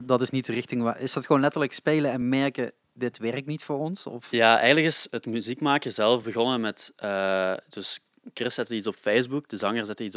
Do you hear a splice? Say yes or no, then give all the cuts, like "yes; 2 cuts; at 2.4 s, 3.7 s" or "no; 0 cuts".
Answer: no; 0 cuts